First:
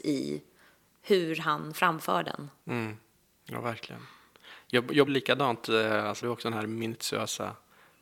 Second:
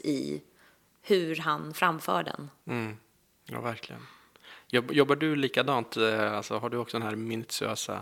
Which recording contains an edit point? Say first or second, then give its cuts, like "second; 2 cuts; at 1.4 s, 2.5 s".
first; 2 cuts; at 5.1 s, 6.2 s